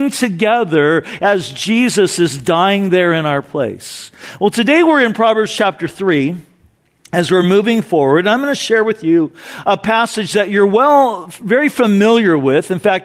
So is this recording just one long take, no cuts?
yes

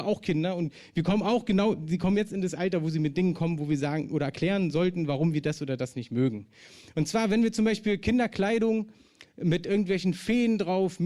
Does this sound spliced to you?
no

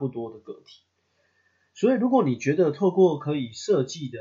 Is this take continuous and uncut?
yes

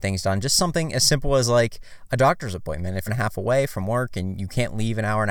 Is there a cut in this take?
yes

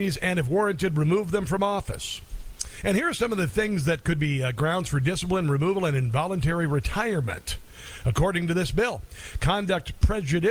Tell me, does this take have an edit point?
no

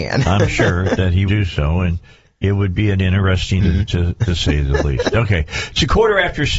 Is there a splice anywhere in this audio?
yes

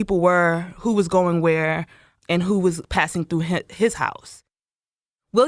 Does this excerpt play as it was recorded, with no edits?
yes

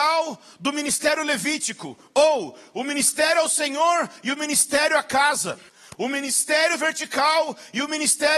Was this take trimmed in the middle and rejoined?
yes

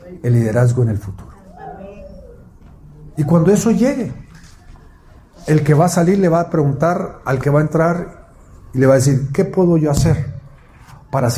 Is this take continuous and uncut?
yes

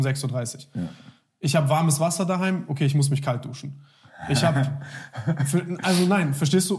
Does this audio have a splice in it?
no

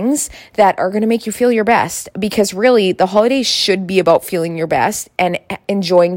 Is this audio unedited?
yes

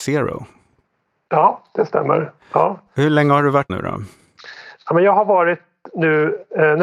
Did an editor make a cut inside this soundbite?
yes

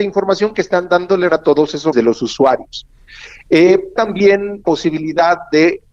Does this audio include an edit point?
yes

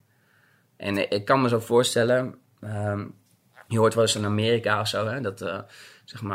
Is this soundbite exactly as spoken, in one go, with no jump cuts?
yes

